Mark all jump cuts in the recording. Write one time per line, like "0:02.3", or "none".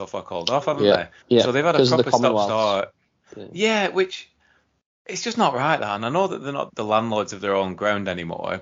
0:06.7